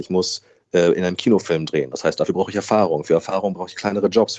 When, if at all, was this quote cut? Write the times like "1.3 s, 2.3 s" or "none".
none

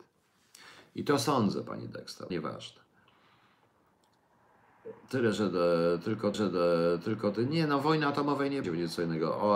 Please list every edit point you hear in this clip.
2.3 s, 5.0 s, 6.3 s, 8.6 s

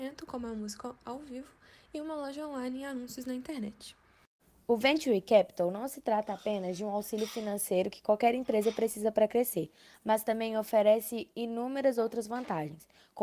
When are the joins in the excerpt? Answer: 4.4 s

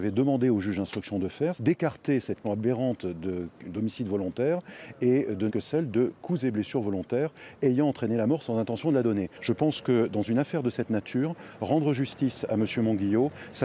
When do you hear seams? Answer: 1.6 s, 2.4 s, 5.5 s

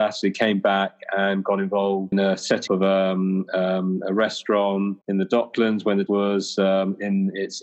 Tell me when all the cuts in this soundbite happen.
2.1 s, 2.7 s, 5.0 s, 6.1 s

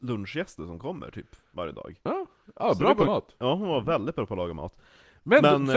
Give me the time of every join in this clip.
3.0 s

